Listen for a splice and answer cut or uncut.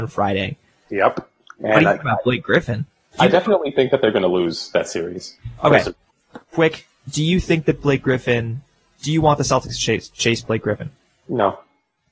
uncut